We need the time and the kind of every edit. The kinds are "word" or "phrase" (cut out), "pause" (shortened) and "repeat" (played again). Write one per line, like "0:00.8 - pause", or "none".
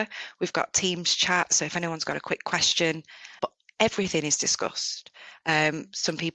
0:03.4 - word